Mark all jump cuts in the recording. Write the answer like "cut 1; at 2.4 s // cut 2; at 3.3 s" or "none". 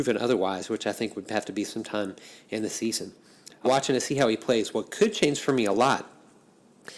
cut 1; at 3.6 s